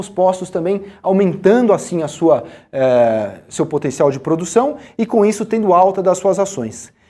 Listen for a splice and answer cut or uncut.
uncut